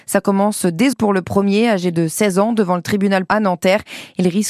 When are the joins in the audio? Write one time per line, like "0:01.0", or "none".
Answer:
0:00.9
0:03.3